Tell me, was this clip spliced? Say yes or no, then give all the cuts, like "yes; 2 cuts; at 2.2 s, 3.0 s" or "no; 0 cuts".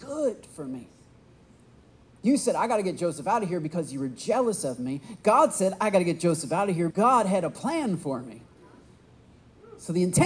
yes; 1 cut; at 6.9 s